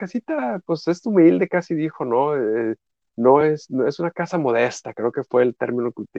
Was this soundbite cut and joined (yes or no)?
no